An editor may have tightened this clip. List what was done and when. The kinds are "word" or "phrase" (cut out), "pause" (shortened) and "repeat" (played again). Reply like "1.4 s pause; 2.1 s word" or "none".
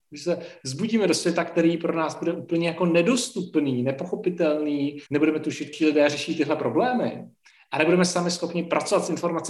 5.1 s pause; 5.7 s word